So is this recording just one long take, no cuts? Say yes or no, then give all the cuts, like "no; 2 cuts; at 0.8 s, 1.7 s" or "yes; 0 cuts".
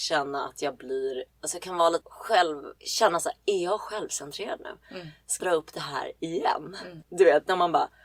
no; 4 cuts; at 1.3 s, 2.0 s, 2.8 s, 5.4 s